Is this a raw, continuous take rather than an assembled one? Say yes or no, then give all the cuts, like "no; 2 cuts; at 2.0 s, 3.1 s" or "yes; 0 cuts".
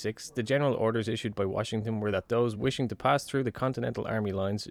yes; 0 cuts